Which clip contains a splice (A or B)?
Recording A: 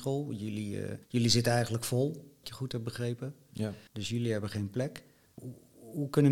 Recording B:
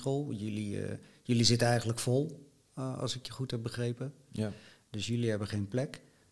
A